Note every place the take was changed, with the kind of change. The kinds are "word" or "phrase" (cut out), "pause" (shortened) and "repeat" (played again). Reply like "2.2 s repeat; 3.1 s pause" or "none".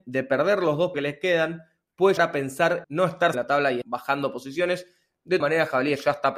0.9 s word; 2.2 s word; 2.8 s word; 3.3 s word; 3.8 s word; 5.4 s word